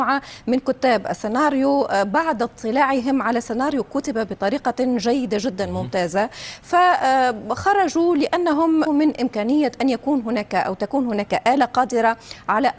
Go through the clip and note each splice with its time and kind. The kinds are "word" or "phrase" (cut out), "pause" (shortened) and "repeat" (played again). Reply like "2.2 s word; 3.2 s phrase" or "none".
8.9 s word

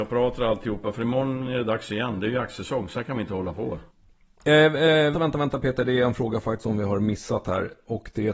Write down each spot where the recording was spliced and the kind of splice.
5.1 s word; 6.6 s word

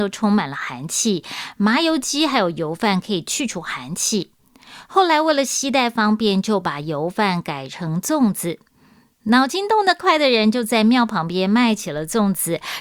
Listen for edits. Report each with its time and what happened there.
none

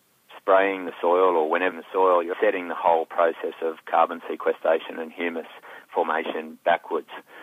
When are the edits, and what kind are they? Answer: 1.7 s phrase; 2.3 s word

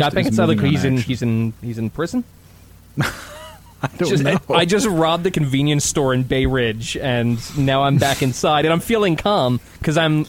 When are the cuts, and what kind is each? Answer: none

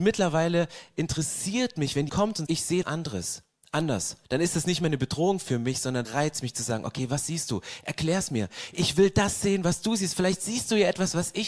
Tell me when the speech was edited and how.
2.1 s word; 2.5 s word; 2.8 s word; 4.2 s pause; 6.0 s word

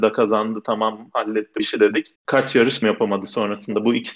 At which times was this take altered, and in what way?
1.6 s word; 2.2 s pause; 2.8 s word

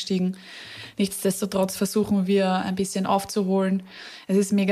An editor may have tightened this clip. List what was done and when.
none

